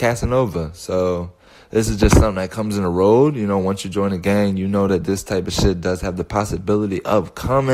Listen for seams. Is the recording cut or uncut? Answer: uncut